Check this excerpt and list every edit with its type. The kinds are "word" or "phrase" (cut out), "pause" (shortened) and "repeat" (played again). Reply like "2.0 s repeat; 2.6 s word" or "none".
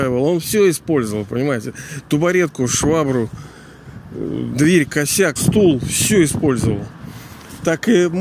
5.4 s word